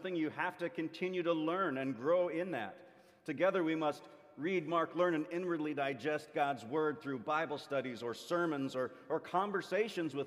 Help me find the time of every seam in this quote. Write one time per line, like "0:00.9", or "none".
none

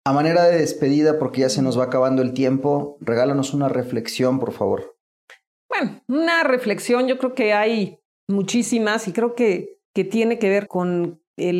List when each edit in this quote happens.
0:08.1
0:09.8
0:10.7

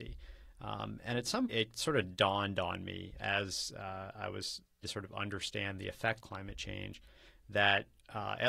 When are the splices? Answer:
0:01.5
0:03.2
0:04.8
0:06.2

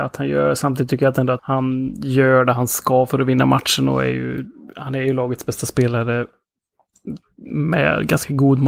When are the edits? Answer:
0:01.4

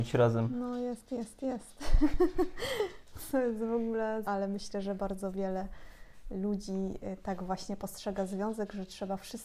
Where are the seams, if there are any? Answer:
0:04.2

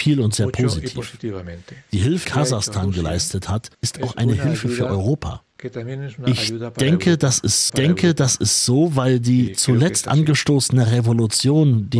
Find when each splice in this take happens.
0:02.2
0:03.7
0:07.7

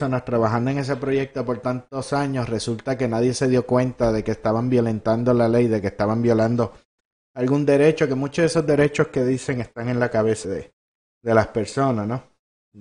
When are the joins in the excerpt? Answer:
0:10.4

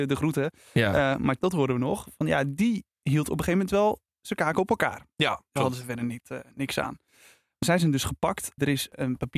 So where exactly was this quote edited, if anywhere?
0:01.4
0:05.1
0:05.6
0:07.6

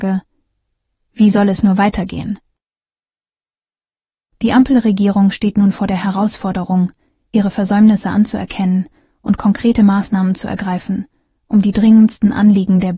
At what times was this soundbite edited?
none

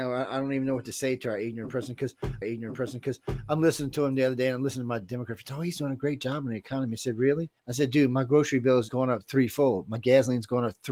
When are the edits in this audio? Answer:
0:02.4
0:07.6
0:08.9

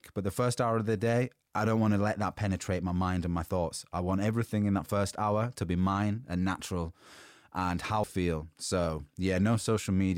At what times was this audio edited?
0:08.0

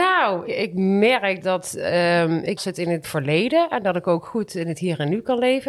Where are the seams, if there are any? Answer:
0:02.6
0:03.0

